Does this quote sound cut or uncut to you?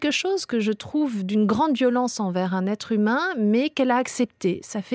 uncut